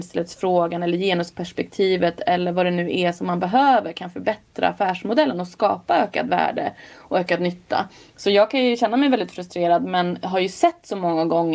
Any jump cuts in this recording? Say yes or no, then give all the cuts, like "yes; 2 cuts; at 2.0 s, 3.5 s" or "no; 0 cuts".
no; 0 cuts